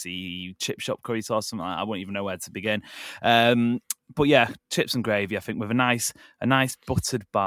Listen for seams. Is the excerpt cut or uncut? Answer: uncut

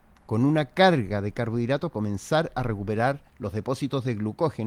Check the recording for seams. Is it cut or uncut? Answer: cut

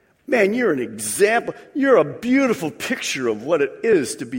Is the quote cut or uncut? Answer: uncut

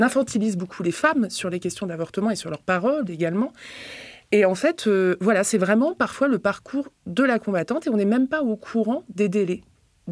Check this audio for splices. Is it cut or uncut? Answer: uncut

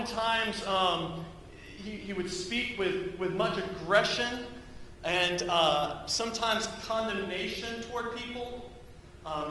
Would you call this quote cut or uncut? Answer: uncut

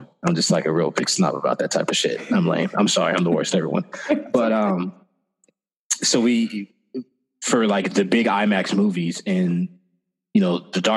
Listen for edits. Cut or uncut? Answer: uncut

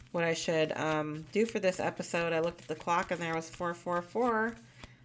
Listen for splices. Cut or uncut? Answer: uncut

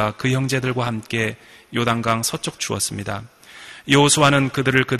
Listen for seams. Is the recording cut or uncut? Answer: cut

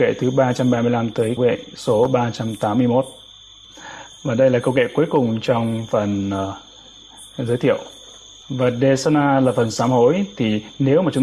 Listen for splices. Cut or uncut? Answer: cut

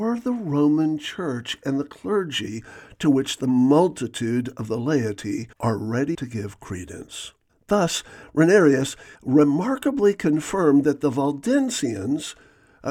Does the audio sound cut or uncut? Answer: cut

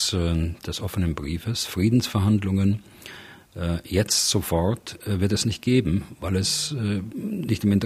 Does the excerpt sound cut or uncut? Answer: uncut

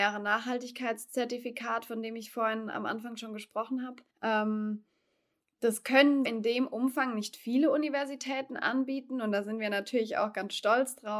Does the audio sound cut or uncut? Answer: cut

